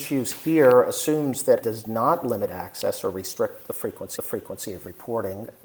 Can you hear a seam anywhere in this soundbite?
yes; 2 cuts; at 1.6 s, 4.2 s

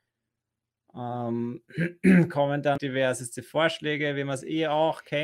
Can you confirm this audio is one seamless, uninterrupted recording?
no; 1 cut; at 2.8 s

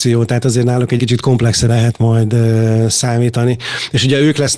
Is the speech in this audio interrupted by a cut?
yes; 2 cuts; at 1.0 s, 1.7 s

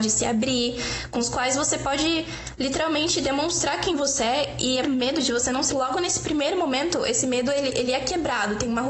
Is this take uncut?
no; 2 cuts; at 4.8 s, 5.7 s

